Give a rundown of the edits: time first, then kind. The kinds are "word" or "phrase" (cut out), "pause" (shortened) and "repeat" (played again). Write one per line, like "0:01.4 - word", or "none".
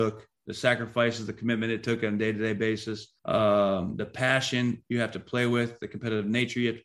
0:03.2 - pause